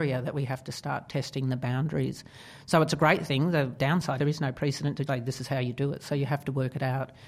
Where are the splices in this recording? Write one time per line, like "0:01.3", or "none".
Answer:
0:03.8
0:04.2
0:05.1